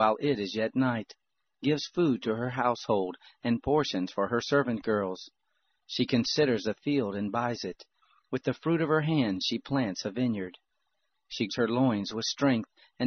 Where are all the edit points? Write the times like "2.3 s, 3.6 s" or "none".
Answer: 11.5 s